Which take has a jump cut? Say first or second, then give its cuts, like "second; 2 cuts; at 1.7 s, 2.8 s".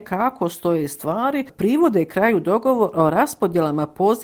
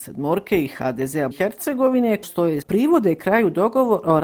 second; 3 cuts; at 1.3 s, 2.2 s, 2.6 s